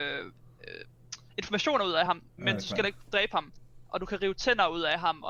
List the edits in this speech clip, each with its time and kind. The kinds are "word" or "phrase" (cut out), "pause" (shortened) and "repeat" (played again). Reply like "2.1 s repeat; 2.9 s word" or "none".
none